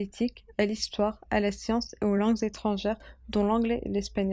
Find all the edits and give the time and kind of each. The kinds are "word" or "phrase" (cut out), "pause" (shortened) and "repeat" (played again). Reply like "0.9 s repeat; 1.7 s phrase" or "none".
none